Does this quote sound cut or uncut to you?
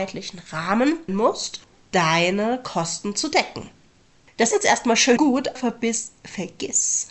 cut